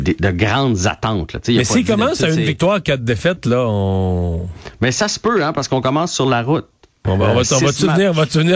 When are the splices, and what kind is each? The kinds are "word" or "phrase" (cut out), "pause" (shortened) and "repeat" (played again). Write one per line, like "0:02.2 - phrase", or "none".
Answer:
none